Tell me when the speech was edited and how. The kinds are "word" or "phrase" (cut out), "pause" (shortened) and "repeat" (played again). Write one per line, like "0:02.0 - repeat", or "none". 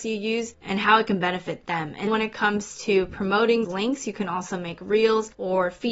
0:02.1 - word
0:03.6 - word